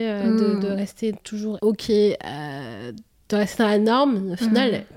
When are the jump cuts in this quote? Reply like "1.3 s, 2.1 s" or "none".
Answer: 1.1 s, 1.6 s